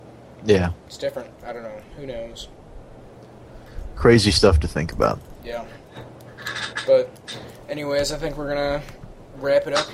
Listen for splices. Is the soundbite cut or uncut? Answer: uncut